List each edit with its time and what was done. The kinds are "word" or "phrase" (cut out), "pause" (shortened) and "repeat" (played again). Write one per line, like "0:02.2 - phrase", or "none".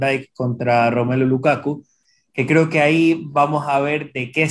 none